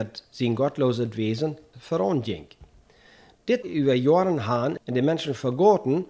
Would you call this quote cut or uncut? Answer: cut